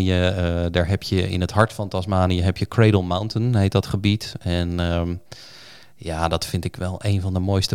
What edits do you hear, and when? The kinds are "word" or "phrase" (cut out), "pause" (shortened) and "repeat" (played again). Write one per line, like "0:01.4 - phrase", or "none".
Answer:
none